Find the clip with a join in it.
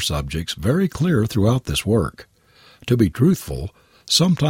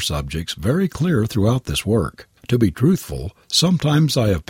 second; 2 cuts; at 2.4 s, 3.4 s

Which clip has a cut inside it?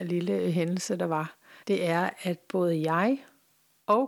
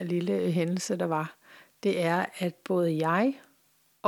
first; 1 cut; at 1.6 s

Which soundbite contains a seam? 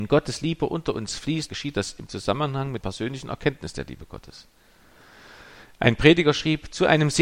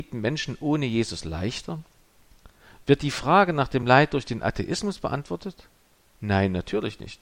first; 2 cuts; at 1.5 s, 2.8 s

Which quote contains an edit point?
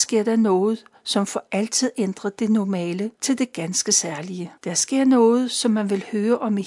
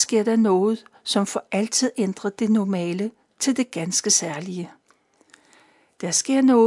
first; 2 cuts; at 3.2 s, 4.6 s

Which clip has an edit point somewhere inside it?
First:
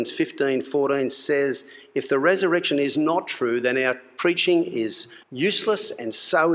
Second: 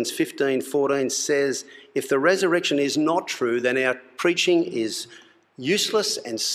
first; 1 cut; at 5.2 s

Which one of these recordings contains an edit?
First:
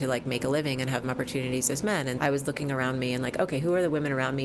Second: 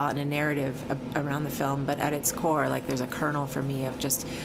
first; 2 cuts; at 1.0 s, 2.2 s

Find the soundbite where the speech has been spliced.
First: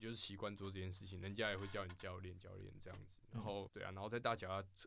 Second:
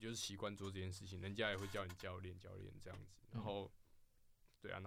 first; 1 cut; at 3.7 s

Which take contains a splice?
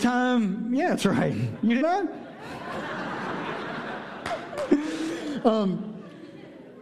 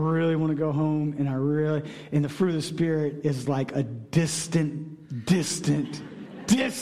first; 1 cut; at 1.8 s

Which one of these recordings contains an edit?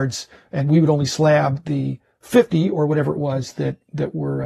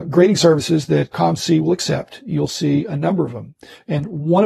second; 1 cut; at 1.1 s

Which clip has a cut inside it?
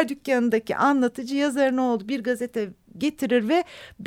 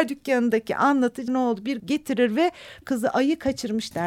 second; 3 cuts; at 1.3 s, 1.8 s, 2.8 s

